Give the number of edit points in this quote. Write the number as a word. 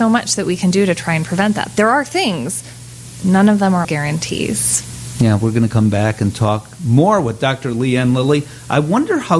one